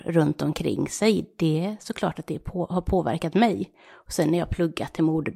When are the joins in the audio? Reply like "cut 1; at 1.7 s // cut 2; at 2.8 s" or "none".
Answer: none